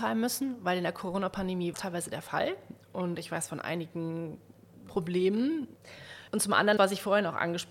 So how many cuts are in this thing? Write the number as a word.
four